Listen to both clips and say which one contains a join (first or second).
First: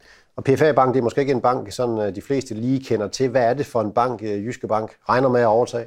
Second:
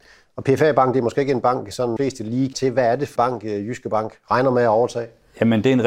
second